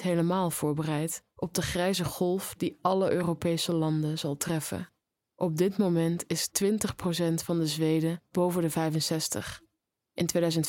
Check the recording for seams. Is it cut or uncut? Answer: uncut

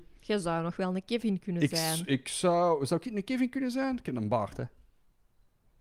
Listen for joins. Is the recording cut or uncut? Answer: uncut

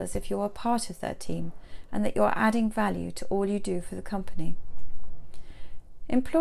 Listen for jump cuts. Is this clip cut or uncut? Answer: uncut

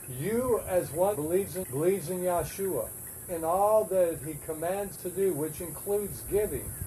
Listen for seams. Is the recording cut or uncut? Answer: cut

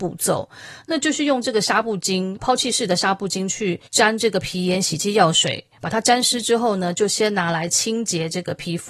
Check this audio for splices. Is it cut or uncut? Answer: cut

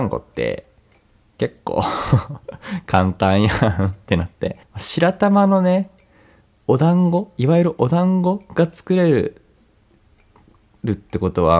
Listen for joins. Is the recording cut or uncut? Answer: cut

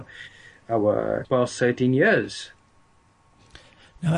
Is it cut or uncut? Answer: cut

